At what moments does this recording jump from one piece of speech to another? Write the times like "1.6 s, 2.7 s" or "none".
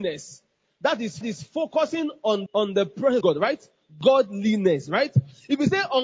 1.2 s, 2.5 s, 3.2 s